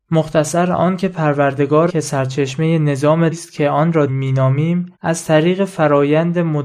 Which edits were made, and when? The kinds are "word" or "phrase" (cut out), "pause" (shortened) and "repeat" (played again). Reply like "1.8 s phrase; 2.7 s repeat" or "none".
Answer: 1.9 s word; 3.3 s word; 4.1 s word; 4.9 s pause